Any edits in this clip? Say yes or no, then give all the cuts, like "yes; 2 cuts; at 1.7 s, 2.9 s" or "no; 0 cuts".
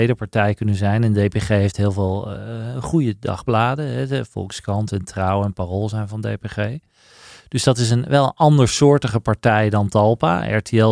no; 0 cuts